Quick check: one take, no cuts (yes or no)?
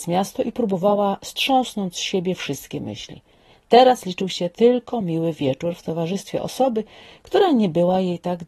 yes